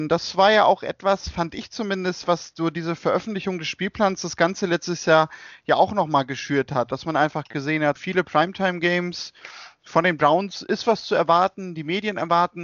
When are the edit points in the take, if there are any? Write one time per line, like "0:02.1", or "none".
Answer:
0:08.0

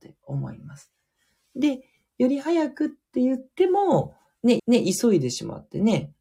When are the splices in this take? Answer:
0:04.6

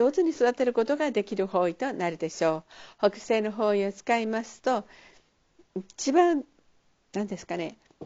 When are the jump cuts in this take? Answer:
none

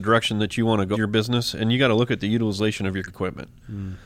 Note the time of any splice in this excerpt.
0:00.9
0:03.1

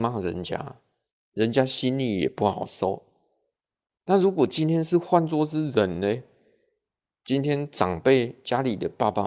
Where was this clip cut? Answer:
none

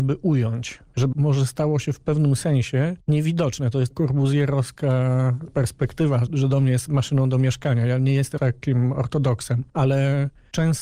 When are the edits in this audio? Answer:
0:01.1
0:03.9
0:06.3
0:08.4

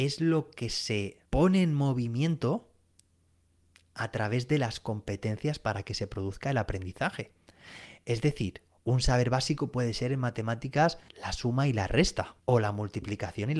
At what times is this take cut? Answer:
0:01.3
0:11.1
0:12.4

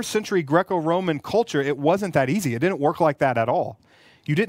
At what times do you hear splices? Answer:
none

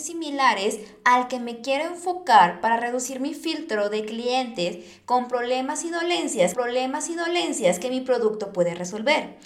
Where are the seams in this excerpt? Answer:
0:06.5

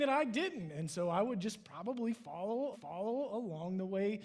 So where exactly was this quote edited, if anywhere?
0:02.7

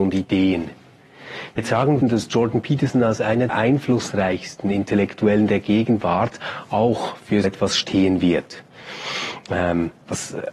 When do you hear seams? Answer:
0:01.6
0:02.0
0:03.5
0:07.4

